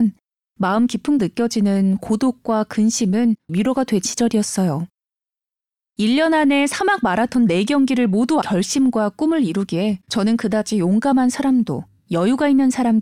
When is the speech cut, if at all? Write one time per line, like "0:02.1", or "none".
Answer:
0:01.2
0:03.5
0:04.1
0:08.4
0:10.0